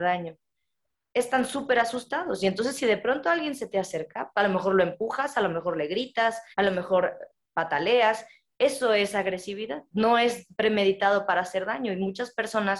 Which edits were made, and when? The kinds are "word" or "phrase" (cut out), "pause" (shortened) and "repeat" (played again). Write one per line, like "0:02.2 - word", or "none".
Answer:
0:06.5 - pause